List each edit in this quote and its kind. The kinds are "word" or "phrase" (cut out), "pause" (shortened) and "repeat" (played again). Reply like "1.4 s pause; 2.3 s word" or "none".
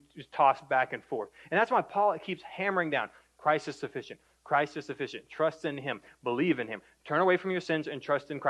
none